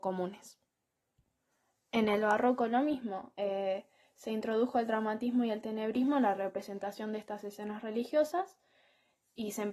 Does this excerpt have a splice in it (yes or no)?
no